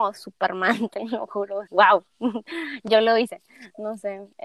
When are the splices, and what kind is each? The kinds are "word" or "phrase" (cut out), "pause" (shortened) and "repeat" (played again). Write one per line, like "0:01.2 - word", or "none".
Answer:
0:01.7 - phrase